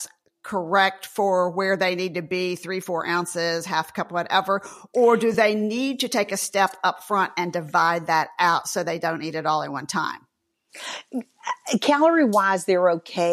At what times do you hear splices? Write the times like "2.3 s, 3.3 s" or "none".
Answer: none

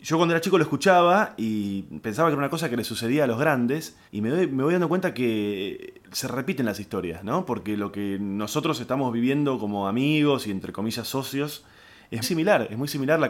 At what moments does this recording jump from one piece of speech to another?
4.1 s, 6.0 s, 12.2 s

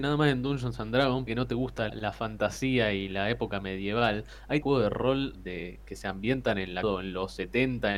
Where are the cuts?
1.3 s, 1.9 s, 4.6 s, 5.3 s, 6.8 s

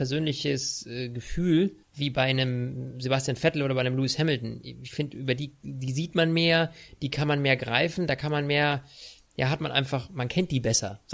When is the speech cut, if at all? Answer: 1.8 s

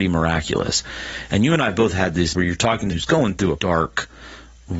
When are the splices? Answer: 2.3 s, 2.9 s, 3.6 s

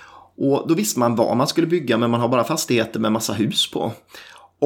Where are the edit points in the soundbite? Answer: none

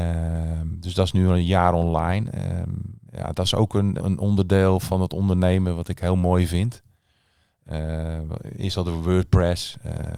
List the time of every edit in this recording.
3.1 s, 4.0 s

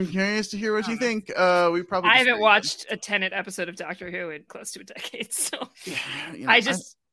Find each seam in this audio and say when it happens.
4.5 s, 5.7 s

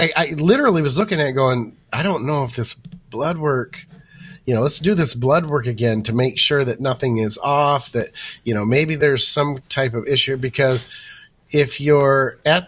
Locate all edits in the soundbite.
none

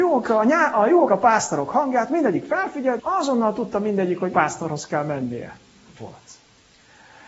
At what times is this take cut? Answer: 1.1 s, 3.0 s, 4.3 s, 6.0 s

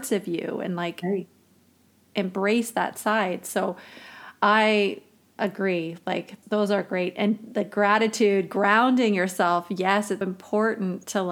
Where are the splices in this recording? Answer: 6.4 s, 10.2 s

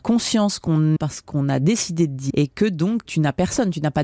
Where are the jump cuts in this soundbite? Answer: 1.0 s, 2.3 s, 3.1 s

